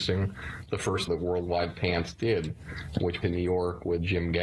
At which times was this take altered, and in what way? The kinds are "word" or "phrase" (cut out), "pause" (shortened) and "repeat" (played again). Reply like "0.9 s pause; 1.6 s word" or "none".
1.1 s phrase; 3.2 s phrase